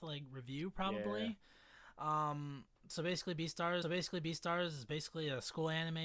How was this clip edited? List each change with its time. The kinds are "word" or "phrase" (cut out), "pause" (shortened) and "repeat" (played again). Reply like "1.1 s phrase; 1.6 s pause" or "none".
3.8 s repeat

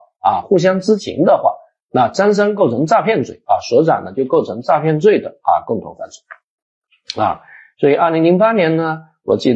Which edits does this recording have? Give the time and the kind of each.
none

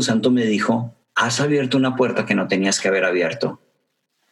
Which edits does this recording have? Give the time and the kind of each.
1.0 s pause

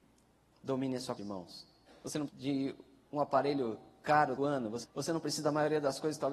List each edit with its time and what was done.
1.2 s word; 2.3 s word; 4.4 s word; 4.8 s word

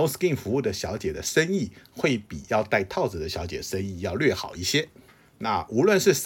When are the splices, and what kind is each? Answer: 5.1 s pause

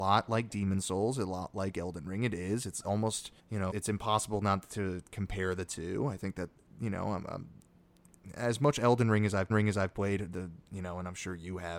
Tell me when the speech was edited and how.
3.4 s pause; 3.7 s word; 9.5 s repeat

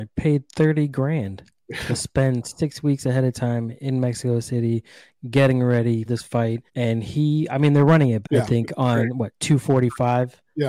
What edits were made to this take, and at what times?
6.1 s word; 6.7 s pause; 8.2 s word

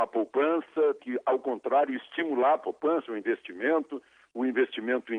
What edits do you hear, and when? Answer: 1.0 s word

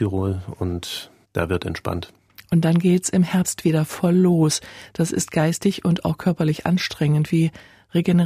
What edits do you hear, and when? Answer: 1.2 s pause

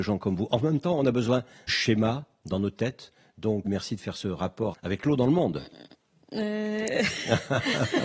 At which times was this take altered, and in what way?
1.7 s word; 3.7 s word; 4.7 s word

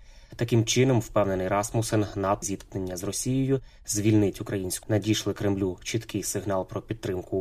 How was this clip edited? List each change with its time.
2.4 s word; 4.8 s word

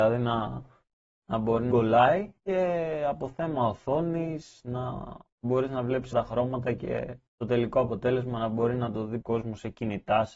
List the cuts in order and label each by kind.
1.7 s word; 2.4 s pause; 6.1 s word; 7.3 s pause; 9.2 s word

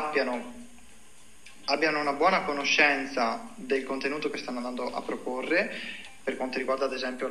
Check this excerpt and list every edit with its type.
none

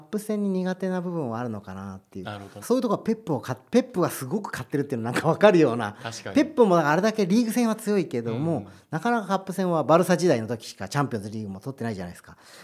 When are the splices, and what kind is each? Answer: 2.6 s word

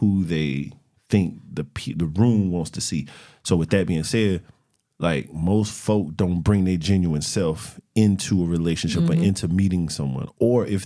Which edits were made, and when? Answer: none

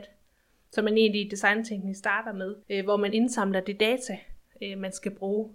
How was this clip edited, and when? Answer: 2.6 s pause

